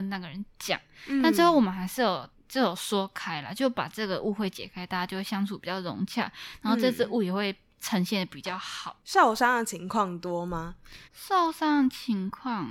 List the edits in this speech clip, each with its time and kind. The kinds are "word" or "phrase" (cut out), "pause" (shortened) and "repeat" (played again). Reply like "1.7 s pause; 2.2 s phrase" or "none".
2.3 s pause; 11.0 s pause